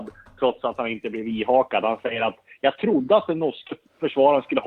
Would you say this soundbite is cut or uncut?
uncut